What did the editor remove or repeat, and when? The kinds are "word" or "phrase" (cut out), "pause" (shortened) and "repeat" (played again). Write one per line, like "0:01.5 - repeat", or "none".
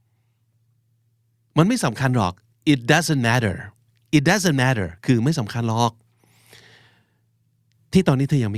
0:03.9 - pause